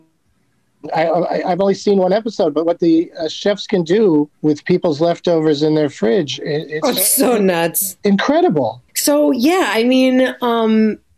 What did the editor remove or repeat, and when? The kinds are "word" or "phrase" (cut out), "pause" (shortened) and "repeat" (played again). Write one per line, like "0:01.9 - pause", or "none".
0:04.3 - pause
0:08.9 - pause